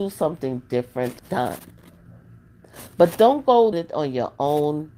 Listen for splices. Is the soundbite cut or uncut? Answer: cut